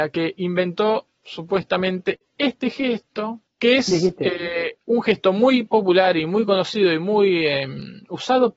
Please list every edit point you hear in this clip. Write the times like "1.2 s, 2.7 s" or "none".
3.5 s